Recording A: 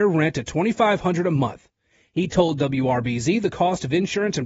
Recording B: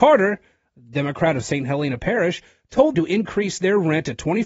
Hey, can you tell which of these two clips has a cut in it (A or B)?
B